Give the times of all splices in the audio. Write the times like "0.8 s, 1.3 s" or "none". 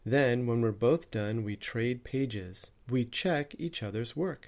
2.8 s